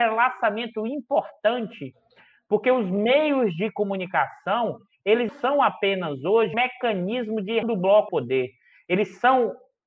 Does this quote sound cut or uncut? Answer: cut